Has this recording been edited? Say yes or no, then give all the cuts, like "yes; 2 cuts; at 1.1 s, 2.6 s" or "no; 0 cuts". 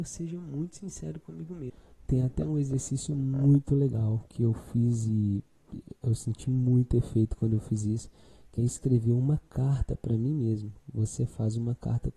no; 0 cuts